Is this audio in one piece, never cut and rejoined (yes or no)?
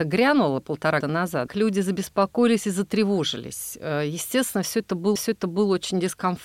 no